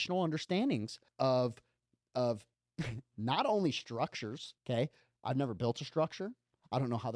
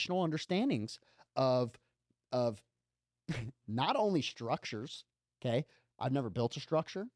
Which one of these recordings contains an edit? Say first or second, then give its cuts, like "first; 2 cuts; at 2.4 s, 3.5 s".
first; 3 cuts; at 1.1 s, 2.5 s, 4.6 s